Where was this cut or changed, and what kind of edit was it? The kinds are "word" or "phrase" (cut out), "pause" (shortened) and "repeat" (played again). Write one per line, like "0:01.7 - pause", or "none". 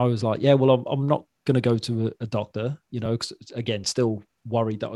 none